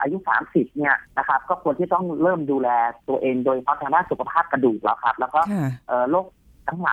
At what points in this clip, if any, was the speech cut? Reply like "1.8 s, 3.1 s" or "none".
1.1 s

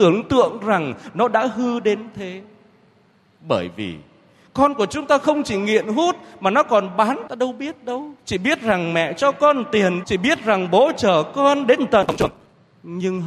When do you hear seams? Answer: 7.3 s, 8.2 s, 10.0 s

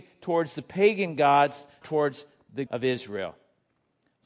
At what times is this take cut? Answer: 1.8 s, 2.7 s

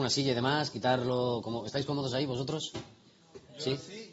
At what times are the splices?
none

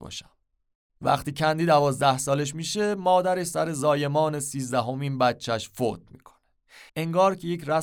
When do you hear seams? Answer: 6.9 s

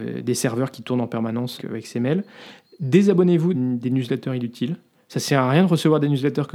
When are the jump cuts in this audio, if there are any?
1.6 s, 3.5 s

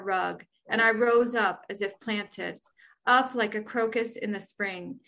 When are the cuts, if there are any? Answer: none

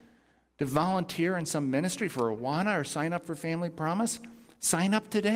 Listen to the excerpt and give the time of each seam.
none

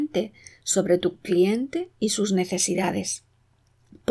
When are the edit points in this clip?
none

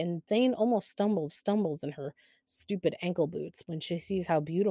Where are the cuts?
1.3 s

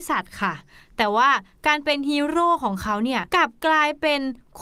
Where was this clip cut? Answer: 3.3 s

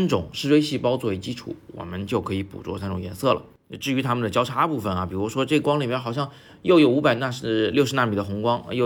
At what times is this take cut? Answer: none

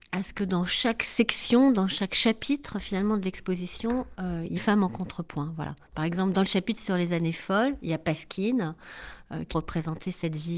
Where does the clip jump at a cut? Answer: 4.6 s, 9.5 s

